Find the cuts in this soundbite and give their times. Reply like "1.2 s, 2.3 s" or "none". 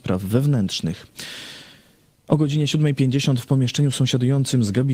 none